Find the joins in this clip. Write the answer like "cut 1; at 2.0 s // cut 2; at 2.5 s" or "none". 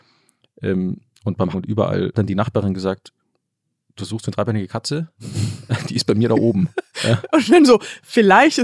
cut 1; at 1.5 s // cut 2; at 2.1 s